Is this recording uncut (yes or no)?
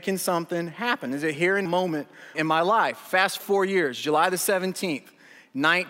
no